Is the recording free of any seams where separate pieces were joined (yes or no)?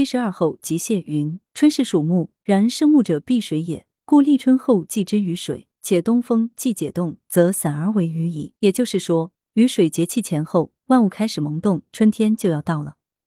no